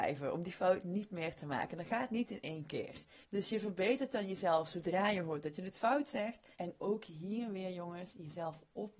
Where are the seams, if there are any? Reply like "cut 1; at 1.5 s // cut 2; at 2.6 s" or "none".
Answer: cut 1; at 3.2 s // cut 2; at 6.5 s